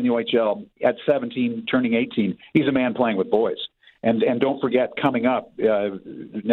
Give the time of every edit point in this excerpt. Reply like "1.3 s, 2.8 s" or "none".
none